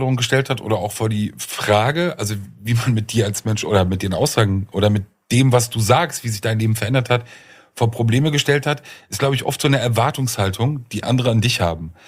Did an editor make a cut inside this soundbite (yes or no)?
no